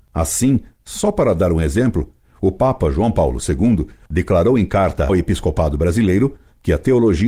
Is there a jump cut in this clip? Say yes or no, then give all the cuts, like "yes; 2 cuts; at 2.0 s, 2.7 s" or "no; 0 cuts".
yes; 1 cut; at 5.1 s